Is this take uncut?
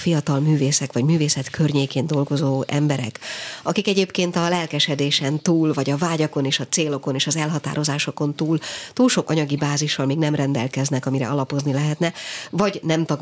no; 1 cut; at 9.2 s

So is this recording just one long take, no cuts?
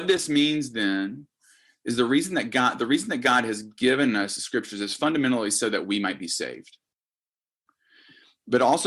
yes; 0 cuts

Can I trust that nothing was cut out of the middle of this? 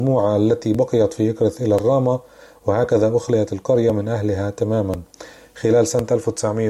yes; 0 cuts

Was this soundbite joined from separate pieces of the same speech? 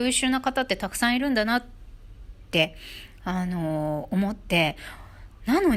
no; 0 cuts

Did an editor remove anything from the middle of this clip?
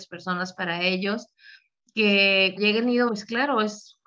yes; 2 cuts; at 2.6 s, 3.1 s

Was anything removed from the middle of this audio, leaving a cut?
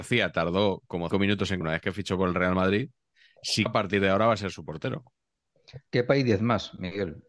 yes; 3 cuts; at 1.1 s, 1.6 s, 3.7 s

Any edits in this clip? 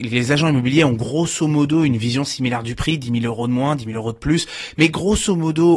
no; 0 cuts

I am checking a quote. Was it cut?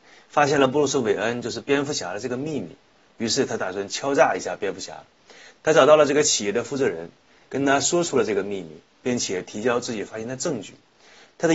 no; 0 cuts

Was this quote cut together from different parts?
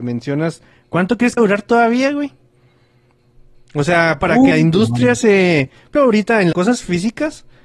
yes; 4 cuts; at 1.4 s, 4.5 s, 6.0 s, 6.5 s

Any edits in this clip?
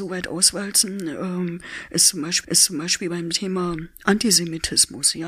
yes; 1 cut; at 2.4 s

